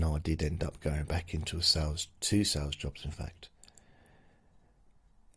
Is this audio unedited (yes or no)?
no